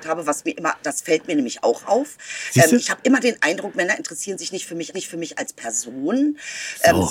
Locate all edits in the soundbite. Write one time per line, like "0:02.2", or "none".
0:04.9